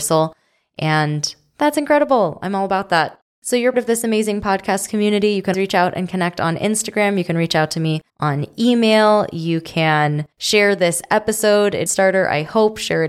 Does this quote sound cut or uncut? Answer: cut